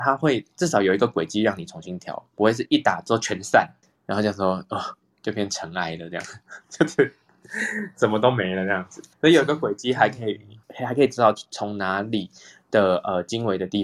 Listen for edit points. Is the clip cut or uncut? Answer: cut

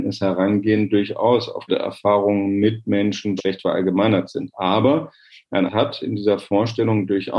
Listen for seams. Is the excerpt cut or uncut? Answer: cut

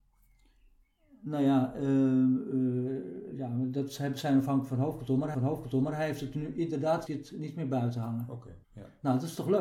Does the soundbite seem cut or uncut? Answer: cut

